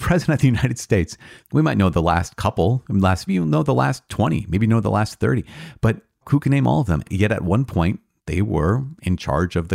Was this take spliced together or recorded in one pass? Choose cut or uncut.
cut